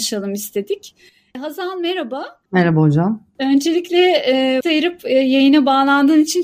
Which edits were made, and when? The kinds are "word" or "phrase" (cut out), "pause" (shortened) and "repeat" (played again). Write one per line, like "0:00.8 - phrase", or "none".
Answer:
0:04.6 - word